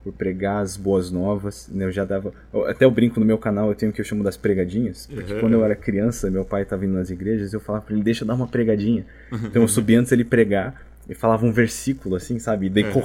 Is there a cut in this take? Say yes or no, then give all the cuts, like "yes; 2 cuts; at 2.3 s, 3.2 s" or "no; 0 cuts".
no; 0 cuts